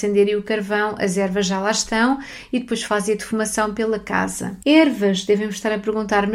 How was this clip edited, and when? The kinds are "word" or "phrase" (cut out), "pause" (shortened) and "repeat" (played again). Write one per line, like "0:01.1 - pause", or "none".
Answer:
0:04.6 - pause